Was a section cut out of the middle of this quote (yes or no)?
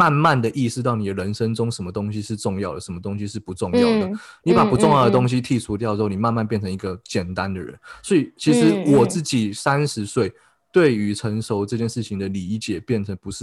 no